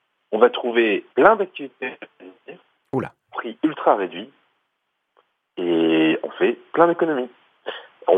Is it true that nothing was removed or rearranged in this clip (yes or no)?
no